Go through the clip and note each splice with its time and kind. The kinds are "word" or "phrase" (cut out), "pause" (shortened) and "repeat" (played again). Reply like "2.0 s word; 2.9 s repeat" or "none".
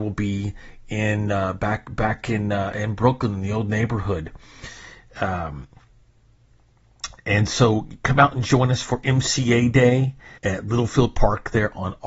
10.4 s pause